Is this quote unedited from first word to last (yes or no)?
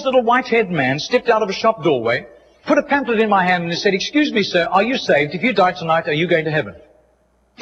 yes